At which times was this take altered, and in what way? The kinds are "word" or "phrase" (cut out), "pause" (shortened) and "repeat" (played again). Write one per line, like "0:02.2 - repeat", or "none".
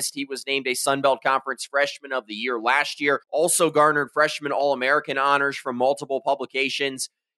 0:03.2 - pause

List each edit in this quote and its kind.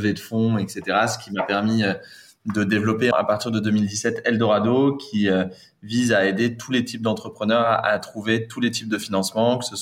none

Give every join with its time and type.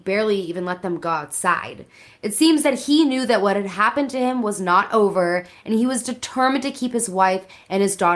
none

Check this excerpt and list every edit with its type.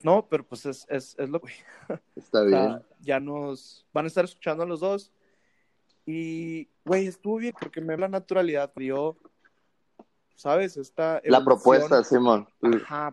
0:01.4 - word
0:03.2 - phrase
0:03.9 - pause
0:06.7 - pause
0:07.5 - word
0:08.0 - word
0:08.8 - phrase
0:10.3 - word

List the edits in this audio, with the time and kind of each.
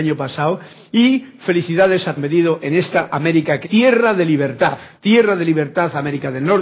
0:02.2 - phrase
0:03.6 - word
0:05.0 - pause

